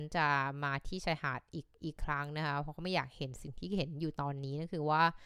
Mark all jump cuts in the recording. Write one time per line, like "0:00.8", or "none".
0:01.7